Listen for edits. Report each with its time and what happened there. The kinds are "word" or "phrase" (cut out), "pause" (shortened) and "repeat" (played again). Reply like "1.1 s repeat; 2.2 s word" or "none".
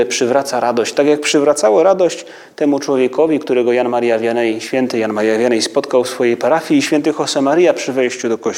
none